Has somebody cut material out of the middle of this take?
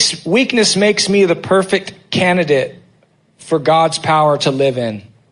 no; 0 cuts

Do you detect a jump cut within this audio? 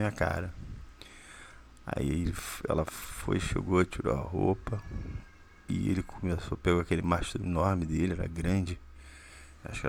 no; 0 cuts

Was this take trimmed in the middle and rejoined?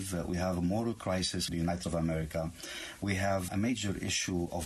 yes; 3 cuts; at 1.5 s, 1.8 s, 3.5 s

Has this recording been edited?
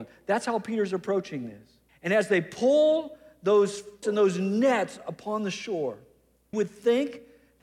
yes; 3 cuts; at 1.9 s, 4.0 s, 6.5 s

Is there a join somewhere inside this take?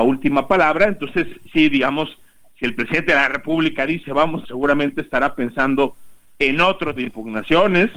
yes; 2 cuts; at 4.4 s, 7.0 s

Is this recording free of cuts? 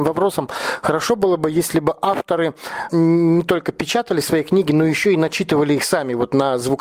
no; 1 cut; at 2.9 s

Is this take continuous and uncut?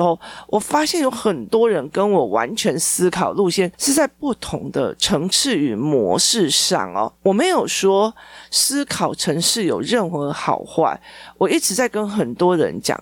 no; 1 cut; at 7.2 s

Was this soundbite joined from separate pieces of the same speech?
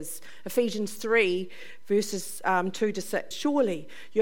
yes; 1 cut; at 3.3 s

